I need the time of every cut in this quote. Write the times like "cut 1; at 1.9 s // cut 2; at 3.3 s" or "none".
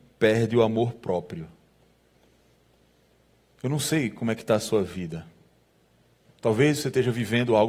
none